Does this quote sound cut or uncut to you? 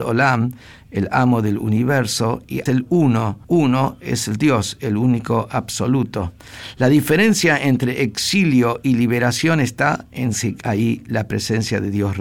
cut